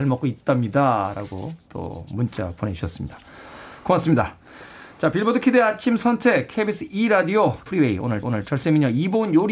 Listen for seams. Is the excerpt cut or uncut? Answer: cut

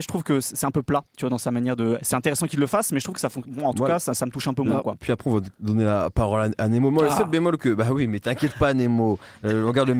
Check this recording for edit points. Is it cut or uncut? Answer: uncut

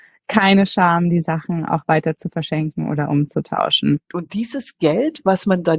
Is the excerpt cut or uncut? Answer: uncut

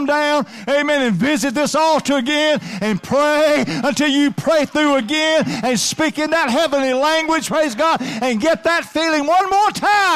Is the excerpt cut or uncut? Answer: uncut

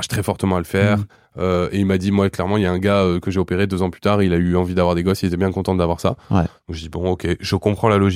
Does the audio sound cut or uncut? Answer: uncut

